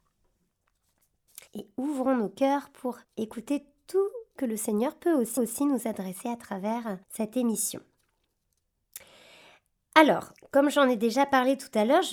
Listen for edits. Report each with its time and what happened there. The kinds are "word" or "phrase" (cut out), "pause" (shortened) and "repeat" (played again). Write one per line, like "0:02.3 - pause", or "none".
0:01.5 - pause
0:03.0 - pause
0:04.4 - phrase
0:05.4 - repeat
0:07.0 - pause
0:10.4 - pause

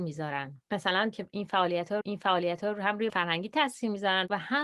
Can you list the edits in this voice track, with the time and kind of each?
0:01.1 - word
0:02.0 - repeat
0:03.1 - word

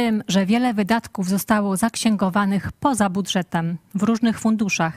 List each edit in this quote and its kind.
none

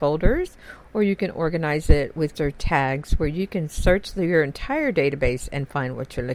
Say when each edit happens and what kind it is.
0:02.3 - word

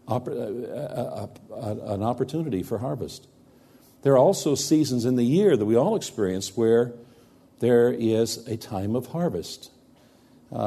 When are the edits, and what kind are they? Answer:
none

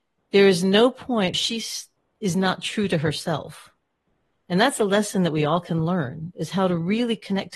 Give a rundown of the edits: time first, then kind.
0:01.3 - word

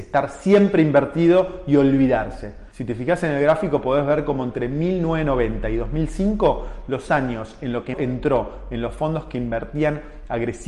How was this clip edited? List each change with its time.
0:02.7 - pause
0:07.9 - phrase

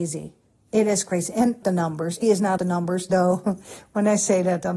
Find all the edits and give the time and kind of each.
0:01.6 - phrase
0:02.2 - word
0:02.6 - word
0:03.1 - word

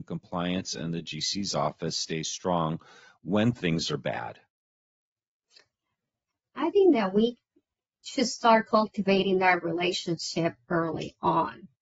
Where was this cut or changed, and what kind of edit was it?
none

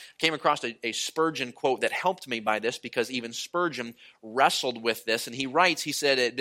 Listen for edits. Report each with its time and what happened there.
none

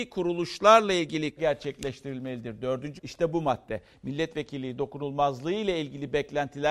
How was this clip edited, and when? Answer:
0:01.4 - phrase
0:03.0 - word

